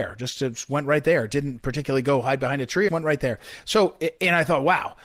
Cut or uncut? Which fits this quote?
cut